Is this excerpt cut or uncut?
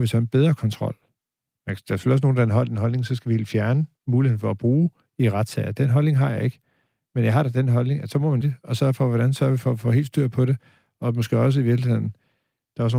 cut